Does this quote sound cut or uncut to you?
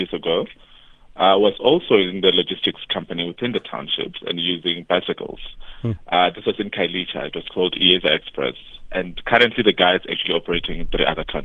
uncut